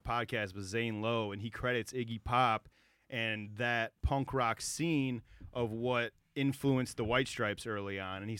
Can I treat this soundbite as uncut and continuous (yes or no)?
yes